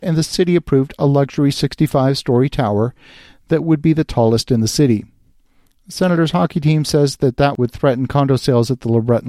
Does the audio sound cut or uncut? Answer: uncut